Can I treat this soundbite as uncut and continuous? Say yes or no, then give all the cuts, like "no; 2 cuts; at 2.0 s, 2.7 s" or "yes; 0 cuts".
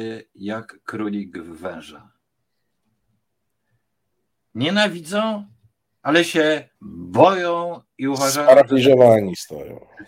no; 1 cut; at 6.7 s